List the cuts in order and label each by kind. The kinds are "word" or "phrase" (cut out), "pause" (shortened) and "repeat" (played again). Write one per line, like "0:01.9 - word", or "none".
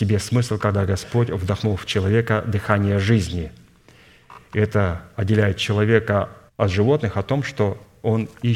0:06.5 - pause